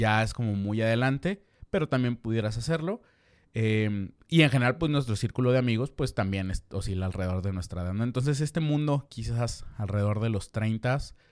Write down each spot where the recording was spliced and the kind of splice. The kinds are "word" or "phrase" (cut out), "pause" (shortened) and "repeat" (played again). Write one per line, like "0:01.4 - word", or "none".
none

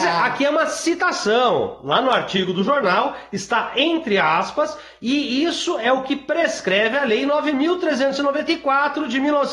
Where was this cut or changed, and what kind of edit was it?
none

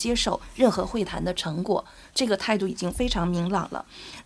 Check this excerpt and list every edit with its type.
none

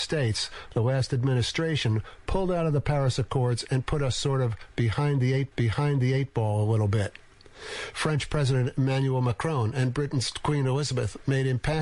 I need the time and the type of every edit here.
0:05.5 - repeat

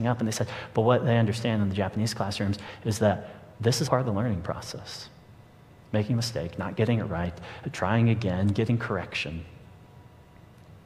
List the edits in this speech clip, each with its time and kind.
0:03.5 - pause
0:03.8 - word

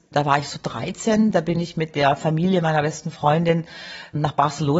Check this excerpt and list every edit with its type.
none

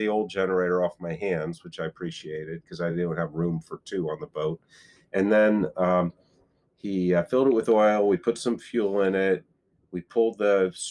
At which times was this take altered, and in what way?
none

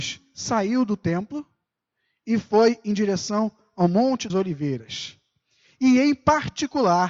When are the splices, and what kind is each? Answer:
0:04.3 - word

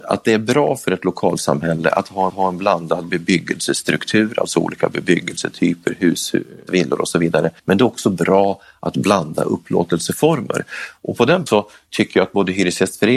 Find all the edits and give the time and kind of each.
0:02.3 - repeat
0:06.7 - word
0:07.6 - pause
0:11.5 - word

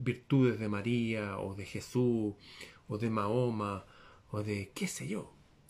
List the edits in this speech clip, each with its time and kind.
none

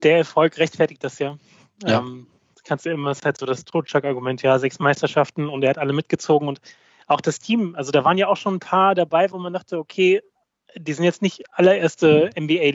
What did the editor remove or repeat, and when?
none

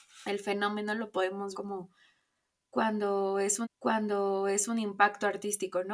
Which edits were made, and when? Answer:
0:01.5 - word
0:03.6 - repeat

